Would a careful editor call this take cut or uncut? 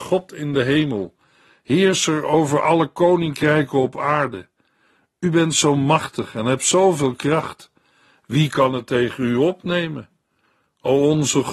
uncut